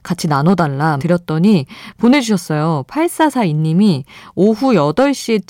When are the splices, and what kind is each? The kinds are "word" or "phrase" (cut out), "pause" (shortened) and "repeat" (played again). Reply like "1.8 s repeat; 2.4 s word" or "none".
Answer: 1.0 s word